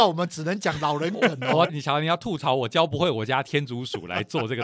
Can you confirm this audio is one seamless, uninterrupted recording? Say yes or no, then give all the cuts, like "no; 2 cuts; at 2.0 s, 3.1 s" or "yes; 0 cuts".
no; 1 cut; at 1.7 s